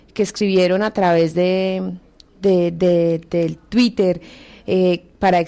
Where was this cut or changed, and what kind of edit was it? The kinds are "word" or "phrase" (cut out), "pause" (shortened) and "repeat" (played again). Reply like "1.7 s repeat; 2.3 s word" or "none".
none